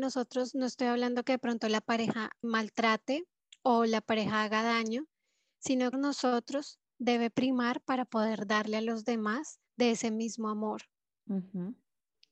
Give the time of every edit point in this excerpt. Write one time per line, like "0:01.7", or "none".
0:02.4
0:03.4
0:05.9
0:09.7